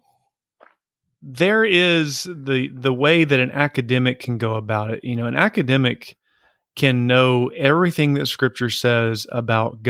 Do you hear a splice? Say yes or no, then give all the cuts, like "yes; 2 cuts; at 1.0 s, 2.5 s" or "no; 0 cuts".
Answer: no; 0 cuts